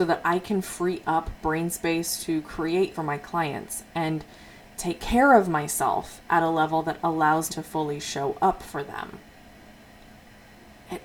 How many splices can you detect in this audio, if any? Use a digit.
2